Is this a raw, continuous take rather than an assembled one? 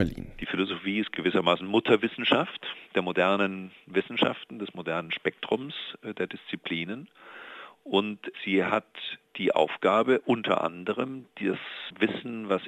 yes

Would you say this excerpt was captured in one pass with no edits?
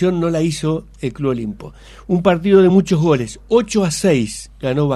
yes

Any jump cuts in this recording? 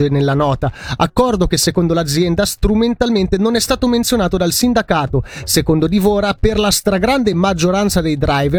no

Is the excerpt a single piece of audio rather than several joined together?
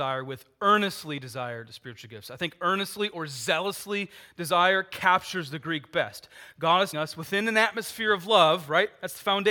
no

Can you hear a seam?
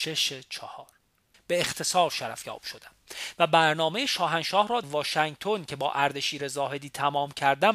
yes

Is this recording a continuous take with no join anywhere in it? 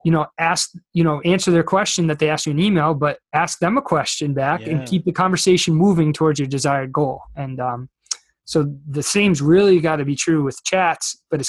yes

